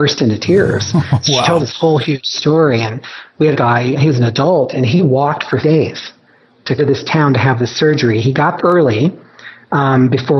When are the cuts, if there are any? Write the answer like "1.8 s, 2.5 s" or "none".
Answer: 1.6 s, 3.5 s, 4.0 s, 5.6 s, 6.8 s, 8.6 s